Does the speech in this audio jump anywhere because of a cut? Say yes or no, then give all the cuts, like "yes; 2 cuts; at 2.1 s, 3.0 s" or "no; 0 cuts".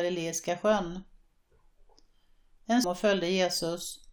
yes; 1 cut; at 2.8 s